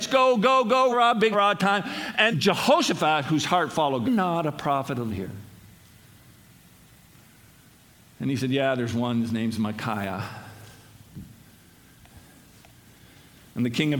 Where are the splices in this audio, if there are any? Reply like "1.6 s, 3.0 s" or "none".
0.9 s, 1.3 s, 2.3 s, 4.0 s, 5.1 s